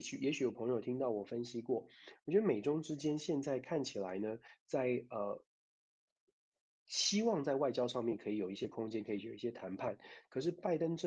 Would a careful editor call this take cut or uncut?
uncut